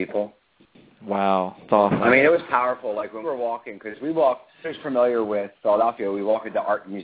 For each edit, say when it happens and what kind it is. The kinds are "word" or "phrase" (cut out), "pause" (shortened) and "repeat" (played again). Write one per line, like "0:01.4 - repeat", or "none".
0:01.7 - word
0:03.2 - word
0:04.6 - word